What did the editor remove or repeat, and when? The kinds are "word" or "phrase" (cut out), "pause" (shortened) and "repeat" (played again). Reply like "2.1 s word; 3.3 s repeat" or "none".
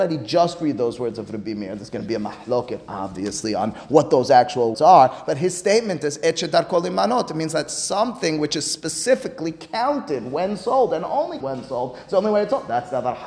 4.7 s word; 11.4 s word